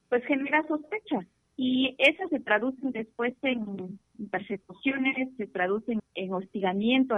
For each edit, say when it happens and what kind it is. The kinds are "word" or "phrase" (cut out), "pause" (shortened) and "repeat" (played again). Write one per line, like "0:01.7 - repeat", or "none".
0:01.4 - pause
0:02.3 - word
0:06.0 - word